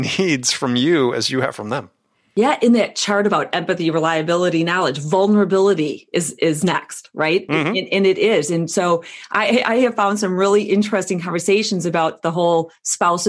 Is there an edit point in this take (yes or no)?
no